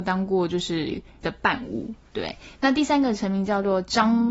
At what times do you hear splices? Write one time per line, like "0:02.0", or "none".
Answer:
0:01.2